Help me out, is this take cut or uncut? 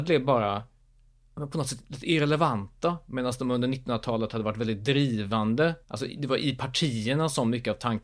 cut